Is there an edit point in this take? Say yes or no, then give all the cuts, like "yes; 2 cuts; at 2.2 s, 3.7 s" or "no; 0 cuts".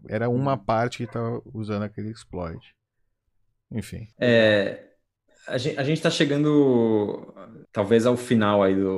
yes; 2 cuts; at 4.1 s, 7.6 s